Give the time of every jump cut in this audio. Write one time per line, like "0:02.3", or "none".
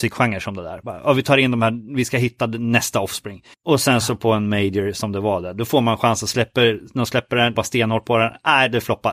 0:03.5
0:07.6

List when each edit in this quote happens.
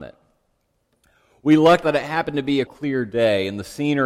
0:01.8
0:02.7

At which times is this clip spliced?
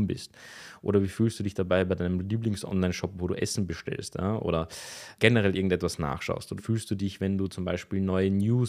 0:05.2
0:06.6

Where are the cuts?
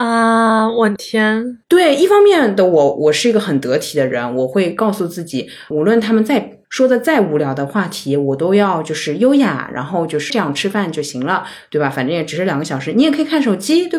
0:10.3

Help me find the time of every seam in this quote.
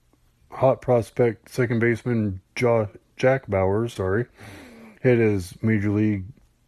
0:04.0

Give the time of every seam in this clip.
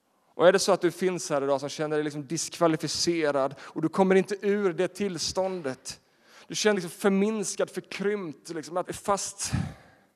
0:06.7
0:08.8

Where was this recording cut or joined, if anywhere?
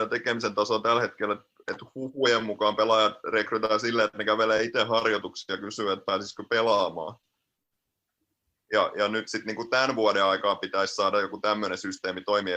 none

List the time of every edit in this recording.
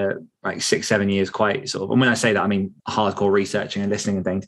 0:02.8

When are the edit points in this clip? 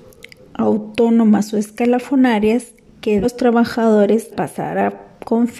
0:03.2
0:04.3

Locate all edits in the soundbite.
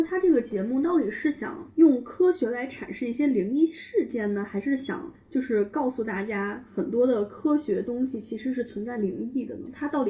0:01.7

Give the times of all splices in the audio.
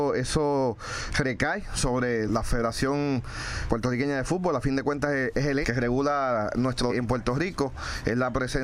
0:02.3
0:03.7
0:05.6
0:06.9

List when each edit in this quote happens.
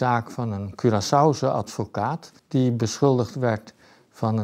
0:02.4

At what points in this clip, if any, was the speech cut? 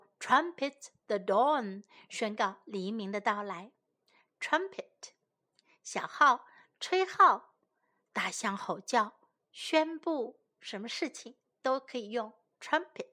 none

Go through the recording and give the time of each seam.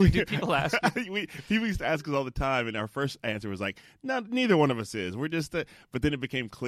none

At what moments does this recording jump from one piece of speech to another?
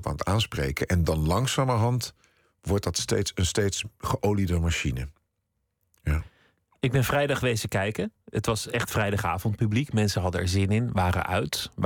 none

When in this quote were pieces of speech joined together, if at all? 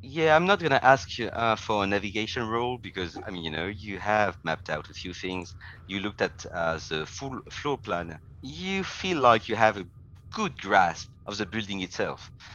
none

